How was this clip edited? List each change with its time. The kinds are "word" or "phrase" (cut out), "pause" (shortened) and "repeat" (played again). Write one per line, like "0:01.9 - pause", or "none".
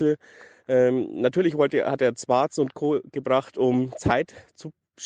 none